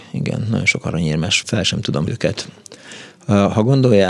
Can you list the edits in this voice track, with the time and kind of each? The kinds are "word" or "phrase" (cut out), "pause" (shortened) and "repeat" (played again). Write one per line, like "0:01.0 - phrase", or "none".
0:01.4 - word
0:02.1 - word